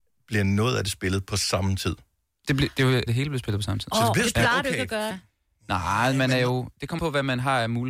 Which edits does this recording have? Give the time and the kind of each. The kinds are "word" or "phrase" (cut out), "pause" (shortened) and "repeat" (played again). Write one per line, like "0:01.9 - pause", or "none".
0:03.1 - word
0:05.1 - word
0:07.0 - word